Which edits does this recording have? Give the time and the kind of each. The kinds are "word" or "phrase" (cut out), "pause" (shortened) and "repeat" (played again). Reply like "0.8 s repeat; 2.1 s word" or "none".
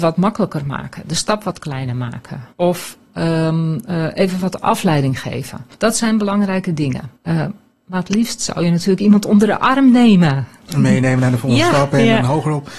2.5 s pause; 5.7 s pause; 7.2 s pause